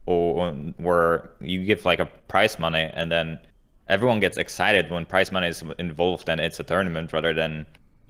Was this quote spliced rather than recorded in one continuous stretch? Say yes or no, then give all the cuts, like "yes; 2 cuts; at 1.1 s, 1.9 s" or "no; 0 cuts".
no; 0 cuts